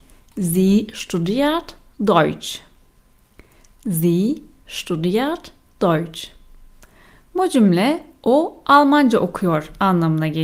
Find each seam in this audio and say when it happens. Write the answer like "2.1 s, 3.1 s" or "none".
none

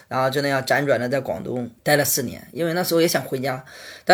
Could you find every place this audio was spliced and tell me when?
1.8 s

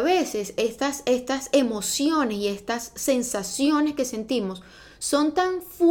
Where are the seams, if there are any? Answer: none

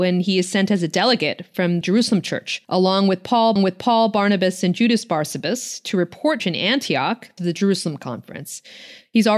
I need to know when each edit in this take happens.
1.8 s, 2.6 s, 3.6 s, 6.4 s, 7.4 s

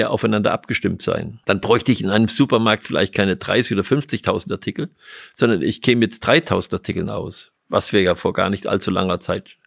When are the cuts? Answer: 1.4 s

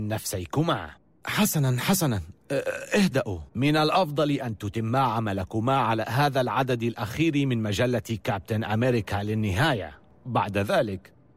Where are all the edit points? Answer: 1.0 s, 3.5 s

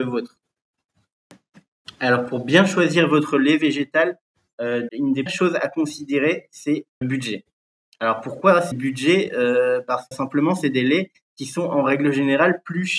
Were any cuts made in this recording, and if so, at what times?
4.9 s, 5.3 s, 7.0 s, 8.7 s, 10.1 s

